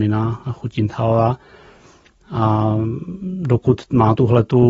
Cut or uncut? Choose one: uncut